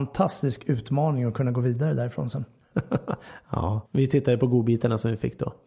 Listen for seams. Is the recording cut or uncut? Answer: cut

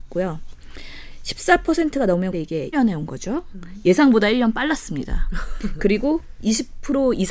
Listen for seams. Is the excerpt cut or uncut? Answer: cut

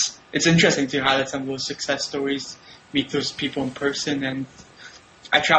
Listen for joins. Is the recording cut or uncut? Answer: uncut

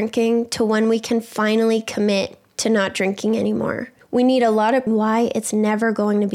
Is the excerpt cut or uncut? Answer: cut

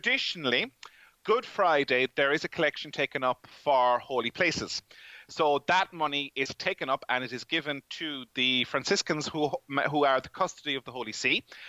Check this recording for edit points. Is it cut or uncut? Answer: uncut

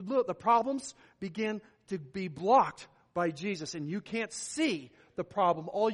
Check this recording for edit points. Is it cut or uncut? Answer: uncut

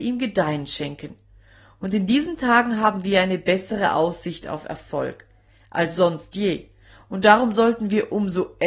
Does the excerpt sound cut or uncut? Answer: uncut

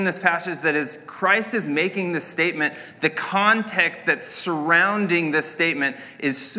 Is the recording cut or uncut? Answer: uncut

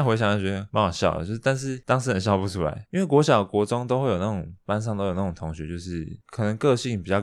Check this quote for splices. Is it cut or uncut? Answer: uncut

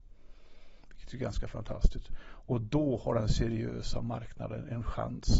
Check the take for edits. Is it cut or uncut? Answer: uncut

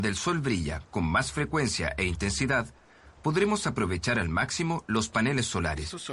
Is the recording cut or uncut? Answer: uncut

